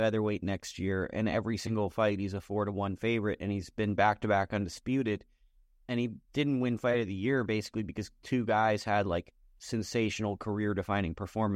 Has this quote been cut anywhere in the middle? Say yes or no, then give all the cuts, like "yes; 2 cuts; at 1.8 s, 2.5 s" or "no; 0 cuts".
no; 0 cuts